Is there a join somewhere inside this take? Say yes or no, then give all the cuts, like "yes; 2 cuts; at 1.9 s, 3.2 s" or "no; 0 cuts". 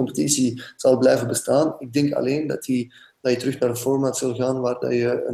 no; 0 cuts